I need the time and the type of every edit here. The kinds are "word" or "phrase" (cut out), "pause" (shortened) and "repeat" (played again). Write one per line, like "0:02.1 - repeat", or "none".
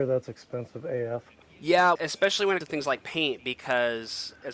0:02.0 - word
0:02.6 - word